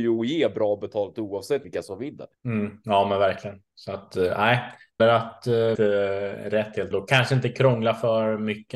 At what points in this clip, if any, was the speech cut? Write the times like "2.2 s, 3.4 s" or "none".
1.6 s, 2.4 s, 5.0 s, 5.7 s, 6.9 s